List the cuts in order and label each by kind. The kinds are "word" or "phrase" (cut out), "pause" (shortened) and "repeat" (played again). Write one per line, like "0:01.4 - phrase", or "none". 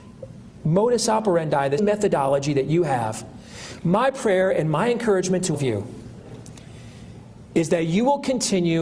0:01.8 - word
0:05.5 - word